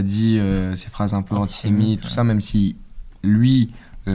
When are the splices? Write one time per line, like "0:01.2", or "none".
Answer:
none